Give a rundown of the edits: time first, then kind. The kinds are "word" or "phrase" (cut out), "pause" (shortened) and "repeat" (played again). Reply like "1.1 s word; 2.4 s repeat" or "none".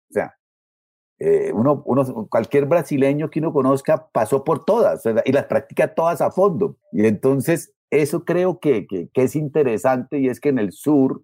6.8 s pause; 9.1 s word